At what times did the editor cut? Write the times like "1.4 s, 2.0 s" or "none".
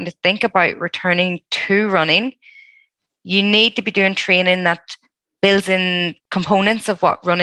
none